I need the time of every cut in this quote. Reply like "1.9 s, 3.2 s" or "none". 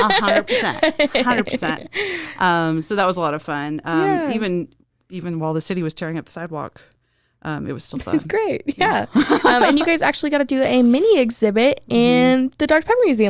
none